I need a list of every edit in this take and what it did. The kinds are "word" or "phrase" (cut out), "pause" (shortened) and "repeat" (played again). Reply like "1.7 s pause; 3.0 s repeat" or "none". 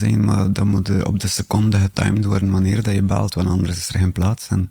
none